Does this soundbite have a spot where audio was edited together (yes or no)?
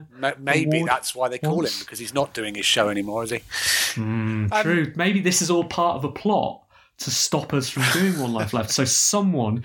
no